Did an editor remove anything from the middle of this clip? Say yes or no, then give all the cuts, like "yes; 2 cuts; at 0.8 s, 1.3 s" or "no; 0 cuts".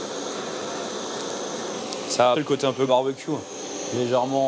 yes; 2 cuts; at 2.3 s, 2.9 s